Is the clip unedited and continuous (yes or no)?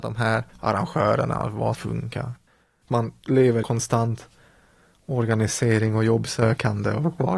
no